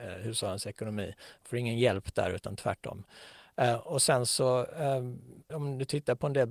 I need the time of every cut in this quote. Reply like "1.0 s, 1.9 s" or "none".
none